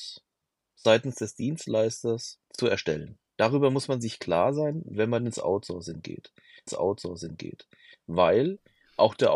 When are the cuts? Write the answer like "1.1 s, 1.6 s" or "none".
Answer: 2.5 s, 3.3 s, 6.7 s